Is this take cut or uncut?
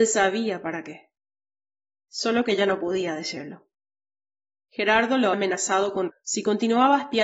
cut